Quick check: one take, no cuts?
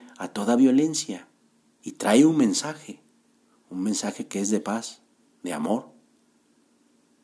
yes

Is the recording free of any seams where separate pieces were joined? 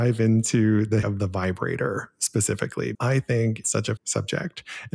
no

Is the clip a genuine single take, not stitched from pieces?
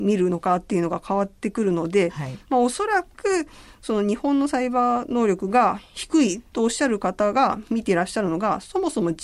yes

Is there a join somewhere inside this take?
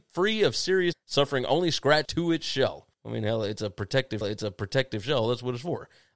yes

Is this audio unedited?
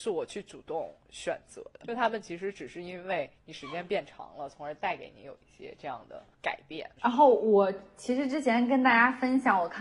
no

